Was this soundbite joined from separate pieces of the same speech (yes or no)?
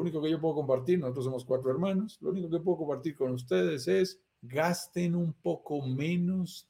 yes